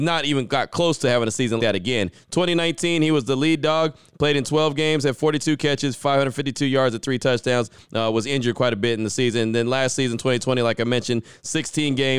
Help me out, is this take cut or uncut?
cut